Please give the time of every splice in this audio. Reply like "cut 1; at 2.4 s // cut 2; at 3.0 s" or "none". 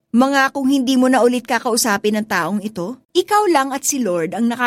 cut 1; at 3.0 s